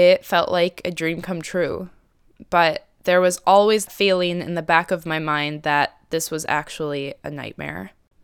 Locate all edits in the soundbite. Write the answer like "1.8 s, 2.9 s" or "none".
3.9 s